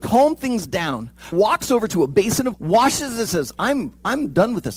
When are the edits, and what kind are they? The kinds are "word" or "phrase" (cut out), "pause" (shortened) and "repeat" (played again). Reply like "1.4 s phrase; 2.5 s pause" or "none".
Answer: 1.3 s word; 2.5 s word; 3.3 s word